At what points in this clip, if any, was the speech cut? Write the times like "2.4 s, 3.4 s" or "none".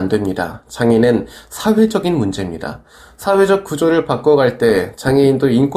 none

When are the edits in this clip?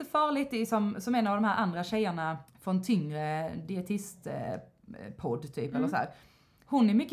2.5 s

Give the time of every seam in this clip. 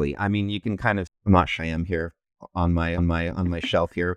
1.1 s, 1.6 s, 3.0 s

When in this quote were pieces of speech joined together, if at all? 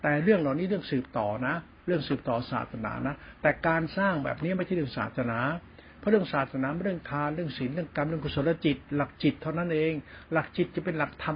none

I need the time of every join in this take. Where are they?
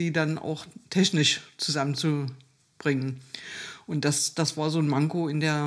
none

